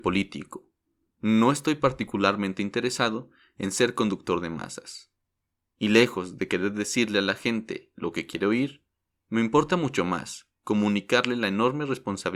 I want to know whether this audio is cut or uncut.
uncut